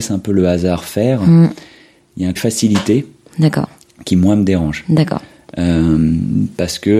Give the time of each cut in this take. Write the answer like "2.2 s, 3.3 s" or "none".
2.4 s